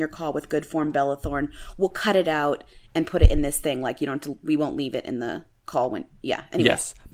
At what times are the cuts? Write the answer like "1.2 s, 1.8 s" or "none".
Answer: none